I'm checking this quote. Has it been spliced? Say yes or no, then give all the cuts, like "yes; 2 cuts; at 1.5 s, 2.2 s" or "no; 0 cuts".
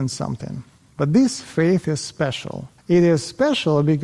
yes; 1 cut; at 2.8 s